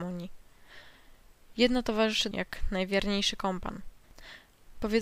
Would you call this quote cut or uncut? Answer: cut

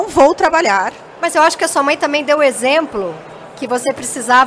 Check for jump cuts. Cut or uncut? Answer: uncut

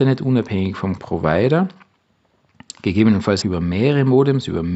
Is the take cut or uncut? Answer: cut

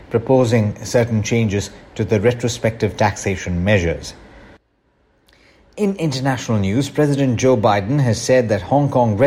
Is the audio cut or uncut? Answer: uncut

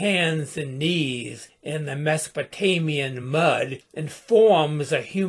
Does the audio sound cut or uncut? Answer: uncut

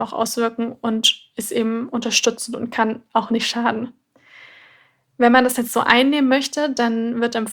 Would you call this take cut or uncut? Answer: uncut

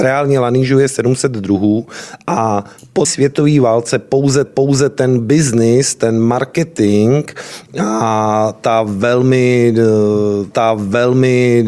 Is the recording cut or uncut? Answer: cut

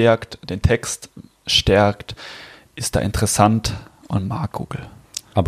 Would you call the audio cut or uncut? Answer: uncut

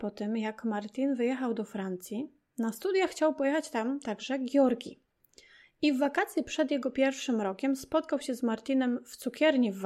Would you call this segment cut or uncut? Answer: uncut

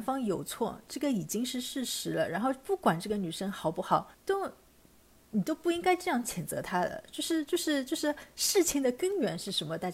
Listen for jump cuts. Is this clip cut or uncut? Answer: cut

